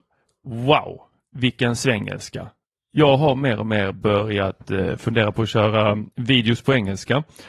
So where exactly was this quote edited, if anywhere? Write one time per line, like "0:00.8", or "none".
0:06.1